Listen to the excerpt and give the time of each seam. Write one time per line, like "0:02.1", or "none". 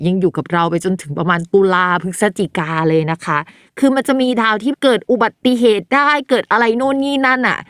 none

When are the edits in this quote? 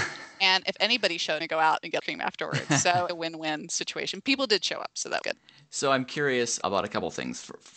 0:01.4
0:02.0
0:03.1
0:05.2
0:06.6

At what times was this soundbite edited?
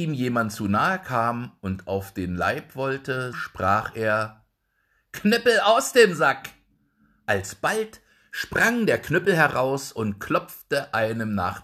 0:03.3

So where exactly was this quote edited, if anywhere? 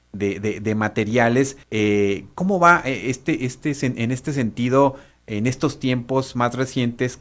0:01.6

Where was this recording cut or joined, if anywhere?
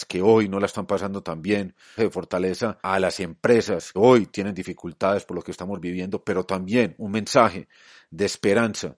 0:02.0
0:02.8
0:03.9

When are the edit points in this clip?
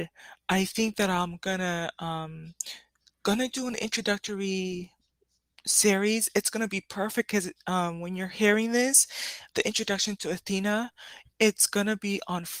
0:09.5

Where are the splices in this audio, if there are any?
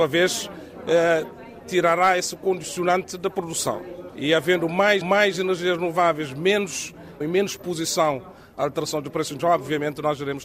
0:05.0
0:07.2
0:09.4

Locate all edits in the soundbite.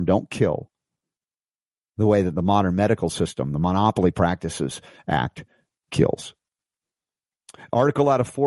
none

